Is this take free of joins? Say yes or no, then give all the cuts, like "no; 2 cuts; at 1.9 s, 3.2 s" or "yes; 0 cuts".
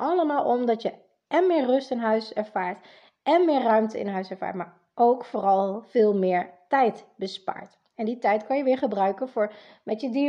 yes; 0 cuts